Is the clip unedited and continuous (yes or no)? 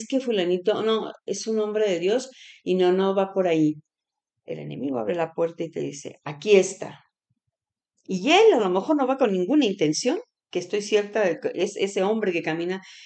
yes